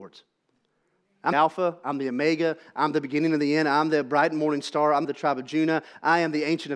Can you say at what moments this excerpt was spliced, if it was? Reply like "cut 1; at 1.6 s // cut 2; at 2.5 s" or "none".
cut 1; at 1.3 s // cut 2; at 5.0 s